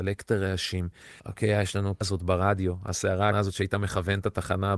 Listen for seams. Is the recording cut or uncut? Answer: cut